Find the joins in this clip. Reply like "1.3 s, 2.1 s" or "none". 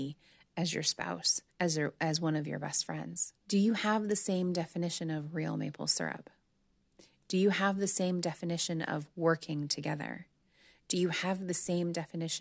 1.5 s, 3.4 s